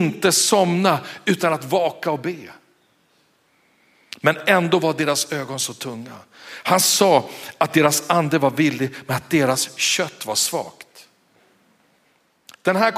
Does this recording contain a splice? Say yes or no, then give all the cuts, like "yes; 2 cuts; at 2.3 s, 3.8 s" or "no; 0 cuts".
no; 0 cuts